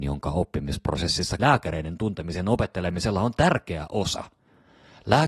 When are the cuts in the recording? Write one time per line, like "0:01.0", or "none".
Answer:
0:01.4